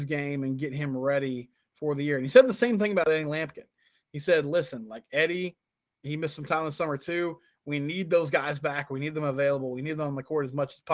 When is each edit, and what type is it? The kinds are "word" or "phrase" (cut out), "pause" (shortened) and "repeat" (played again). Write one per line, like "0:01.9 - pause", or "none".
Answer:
none

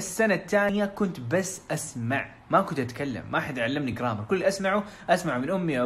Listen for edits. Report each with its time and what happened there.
none

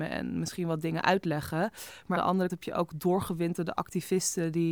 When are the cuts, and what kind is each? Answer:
0:02.2 - word
0:02.5 - word

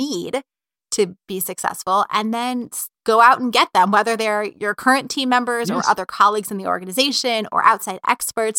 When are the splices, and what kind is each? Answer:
0:02.9 - pause

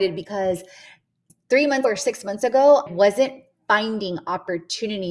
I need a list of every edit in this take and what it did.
0:01.3 - word
0:01.8 - word
0:02.9 - word

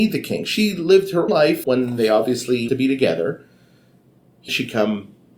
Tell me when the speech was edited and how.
0:01.3 - word
0:01.6 - word
0:02.7 - word
0:04.5 - word

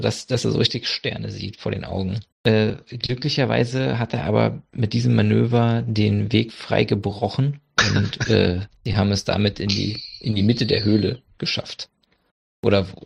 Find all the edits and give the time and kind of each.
0:02.3 - pause
0:08.8 - pause

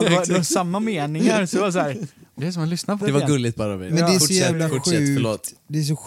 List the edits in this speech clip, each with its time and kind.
0:02.4 - word
0:03.0 - word

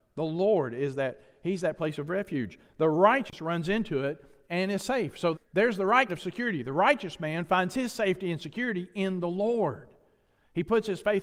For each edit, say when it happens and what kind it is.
0:05.3 - word
0:06.1 - word

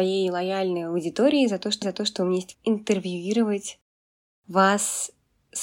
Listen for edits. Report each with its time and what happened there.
0:01.8 - repeat
0:02.5 - word

